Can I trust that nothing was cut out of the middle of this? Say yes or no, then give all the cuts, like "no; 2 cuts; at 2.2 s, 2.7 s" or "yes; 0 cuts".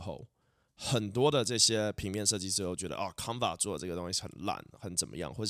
yes; 0 cuts